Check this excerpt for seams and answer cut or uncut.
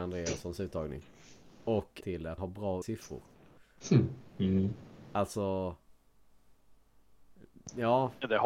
cut